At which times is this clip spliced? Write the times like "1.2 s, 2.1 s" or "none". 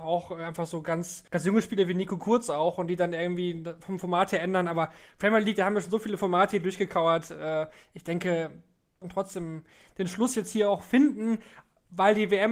1.3 s, 9.0 s

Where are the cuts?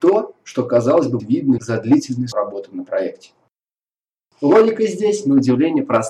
1.2 s, 1.6 s, 2.3 s

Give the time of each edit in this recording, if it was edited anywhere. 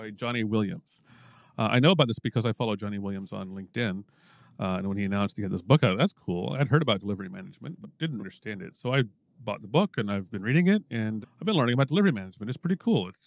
2.2 s, 7.8 s, 8.2 s, 11.2 s

